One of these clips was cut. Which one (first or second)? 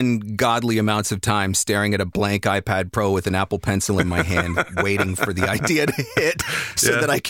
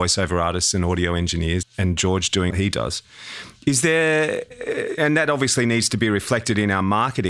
second